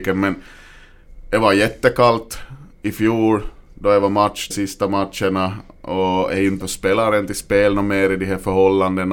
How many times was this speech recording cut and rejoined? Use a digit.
3